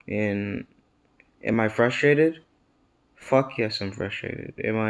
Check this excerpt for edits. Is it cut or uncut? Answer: uncut